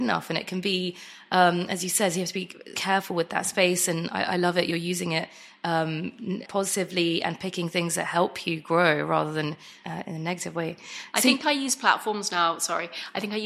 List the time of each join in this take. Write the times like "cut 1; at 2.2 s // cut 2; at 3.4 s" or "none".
cut 1; at 2.7 s // cut 2; at 6.4 s // cut 3; at 9.8 s